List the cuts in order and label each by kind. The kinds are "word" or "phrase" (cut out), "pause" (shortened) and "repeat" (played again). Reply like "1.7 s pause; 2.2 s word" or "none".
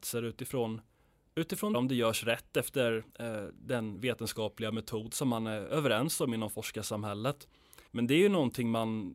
1.7 s phrase; 3.1 s pause; 7.9 s pause